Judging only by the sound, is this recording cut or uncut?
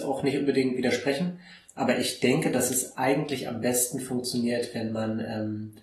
uncut